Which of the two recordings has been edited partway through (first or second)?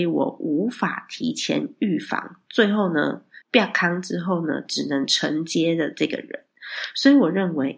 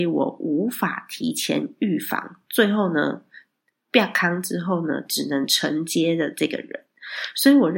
first